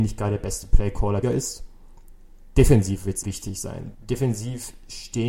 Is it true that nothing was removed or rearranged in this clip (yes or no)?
no